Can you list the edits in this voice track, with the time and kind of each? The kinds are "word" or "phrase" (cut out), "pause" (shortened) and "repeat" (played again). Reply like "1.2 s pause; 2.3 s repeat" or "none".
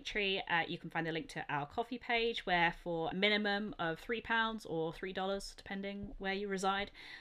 3.1 s word